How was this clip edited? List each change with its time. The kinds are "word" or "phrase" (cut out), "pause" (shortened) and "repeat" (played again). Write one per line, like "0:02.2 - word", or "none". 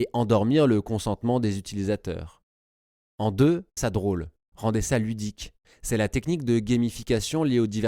0:02.7 - pause
0:03.8 - word